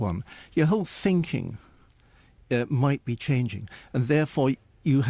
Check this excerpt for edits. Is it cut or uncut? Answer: uncut